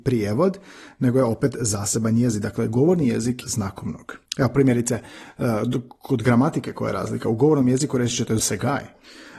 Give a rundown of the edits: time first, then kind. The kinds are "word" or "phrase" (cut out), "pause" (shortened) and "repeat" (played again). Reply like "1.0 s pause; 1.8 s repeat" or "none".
3.4 s phrase; 4.3 s pause; 8.4 s word